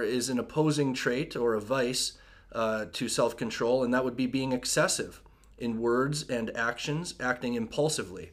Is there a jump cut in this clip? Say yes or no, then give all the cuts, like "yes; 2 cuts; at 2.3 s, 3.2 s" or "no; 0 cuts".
no; 0 cuts